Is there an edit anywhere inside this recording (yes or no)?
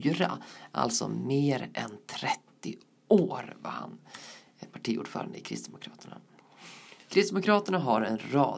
no